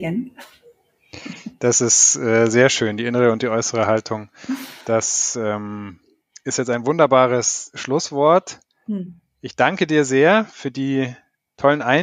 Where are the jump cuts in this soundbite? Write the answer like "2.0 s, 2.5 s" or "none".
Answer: none